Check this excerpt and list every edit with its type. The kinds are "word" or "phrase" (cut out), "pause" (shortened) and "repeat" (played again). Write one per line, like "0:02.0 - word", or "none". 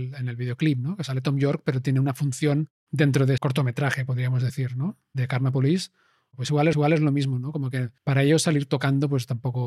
0:03.4 - word
0:06.7 - repeat
0:08.0 - pause